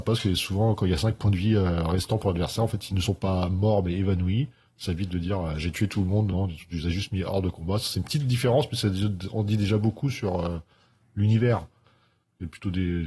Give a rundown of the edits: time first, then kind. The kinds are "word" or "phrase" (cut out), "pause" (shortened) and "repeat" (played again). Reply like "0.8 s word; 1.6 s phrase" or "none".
none